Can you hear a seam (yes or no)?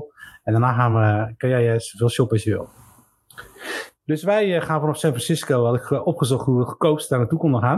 no